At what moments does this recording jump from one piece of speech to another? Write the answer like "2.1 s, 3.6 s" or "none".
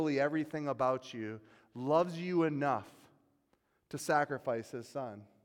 none

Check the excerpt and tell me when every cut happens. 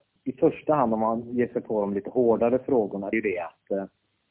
3.1 s

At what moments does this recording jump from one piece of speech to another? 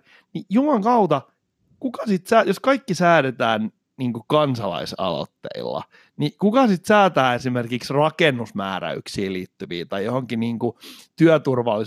none

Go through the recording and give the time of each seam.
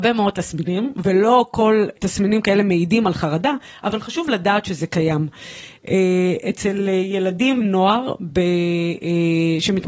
2.0 s, 7.6 s

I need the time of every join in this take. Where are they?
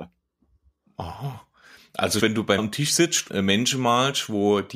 2.2 s, 2.6 s, 3.3 s

